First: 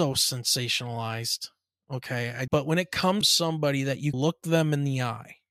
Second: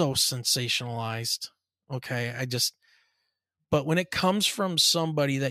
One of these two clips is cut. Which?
first; 3 cuts; at 2.5 s, 3.2 s, 4.1 s

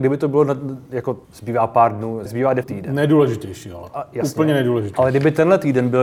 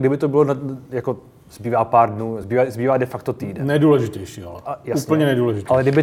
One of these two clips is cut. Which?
first; 3 cuts; at 1.2 s, 2.3 s, 2.6 s

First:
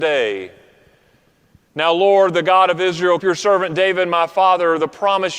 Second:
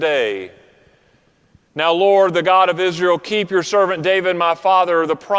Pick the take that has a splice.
first; 1 cut; at 3.2 s

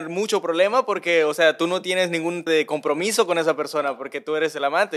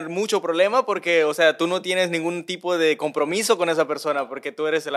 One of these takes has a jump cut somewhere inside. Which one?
first; 1 cut; at 2.5 s

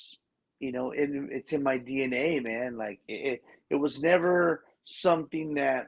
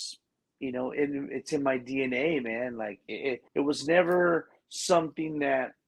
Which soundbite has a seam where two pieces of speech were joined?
second; 1 cut; at 3.5 s

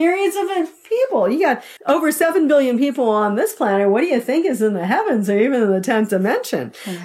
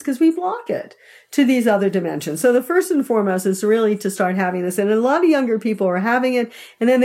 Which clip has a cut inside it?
first; 1 cut; at 1.8 s

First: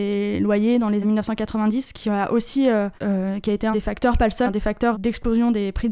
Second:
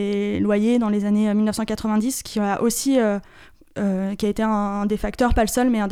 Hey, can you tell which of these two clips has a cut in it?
first; 5 cuts; at 1.0 s, 3.0 s, 3.7 s, 4.5 s, 4.9 s

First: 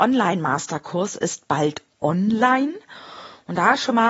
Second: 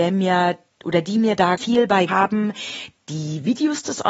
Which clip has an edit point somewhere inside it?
second; 2 cuts; at 1.6 s, 2.1 s

